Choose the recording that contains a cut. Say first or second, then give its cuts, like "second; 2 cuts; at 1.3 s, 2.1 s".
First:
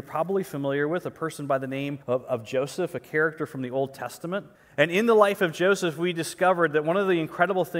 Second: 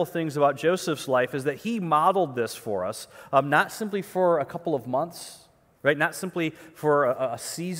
first; 2 cuts; at 2.0 s, 4.5 s